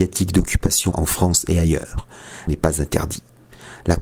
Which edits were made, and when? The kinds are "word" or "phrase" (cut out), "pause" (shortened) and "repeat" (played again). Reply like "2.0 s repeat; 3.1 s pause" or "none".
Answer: 0.9 s word; 2.5 s word